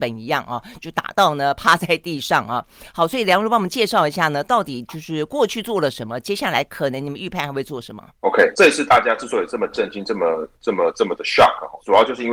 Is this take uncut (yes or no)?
yes